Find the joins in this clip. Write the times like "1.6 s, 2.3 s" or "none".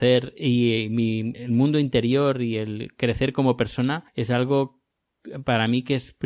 1.3 s, 4.1 s